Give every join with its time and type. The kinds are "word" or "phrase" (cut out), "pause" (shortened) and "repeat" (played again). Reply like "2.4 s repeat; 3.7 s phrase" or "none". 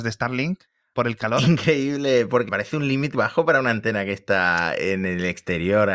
2.5 s word; 3.1 s word